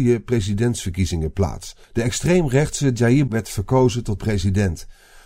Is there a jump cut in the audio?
yes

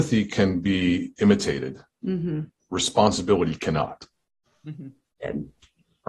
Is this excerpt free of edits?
no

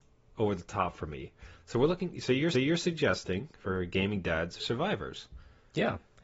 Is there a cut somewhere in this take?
yes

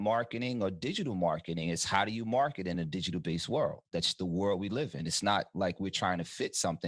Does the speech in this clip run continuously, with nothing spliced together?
yes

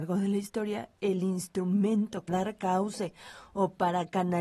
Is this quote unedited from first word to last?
no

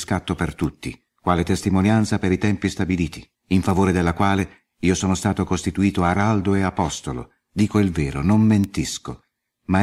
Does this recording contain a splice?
yes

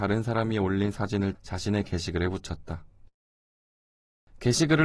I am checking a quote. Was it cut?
yes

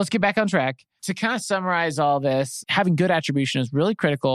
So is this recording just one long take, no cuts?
yes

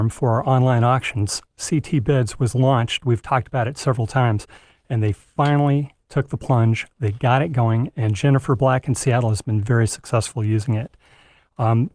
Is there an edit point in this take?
no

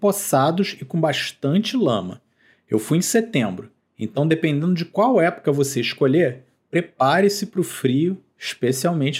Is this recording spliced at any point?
no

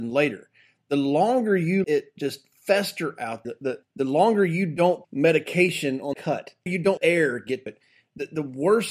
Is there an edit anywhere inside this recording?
yes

